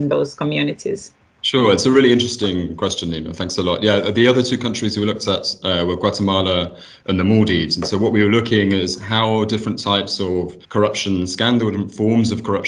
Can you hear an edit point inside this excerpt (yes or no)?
yes